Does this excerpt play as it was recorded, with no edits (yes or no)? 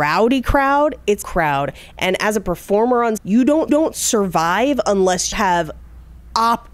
no